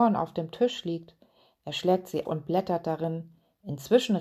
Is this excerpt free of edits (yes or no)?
no